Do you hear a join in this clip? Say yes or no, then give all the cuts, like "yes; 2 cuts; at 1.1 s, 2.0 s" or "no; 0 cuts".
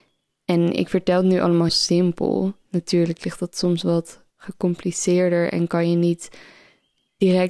yes; 1 cut; at 1.7 s